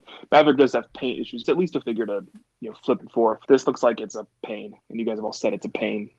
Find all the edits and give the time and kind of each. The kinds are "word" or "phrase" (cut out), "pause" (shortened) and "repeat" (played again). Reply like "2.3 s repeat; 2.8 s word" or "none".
1.4 s phrase; 1.8 s word; 3.0 s word; 3.4 s pause; 4.8 s pause